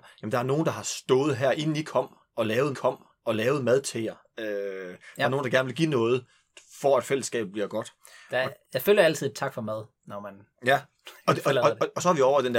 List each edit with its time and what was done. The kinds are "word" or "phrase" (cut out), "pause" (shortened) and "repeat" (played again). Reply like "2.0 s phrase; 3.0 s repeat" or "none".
2.7 s repeat; 8.6 s pause; 11.2 s pause